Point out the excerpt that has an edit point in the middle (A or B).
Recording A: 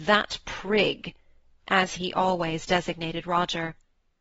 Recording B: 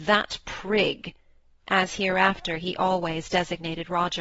A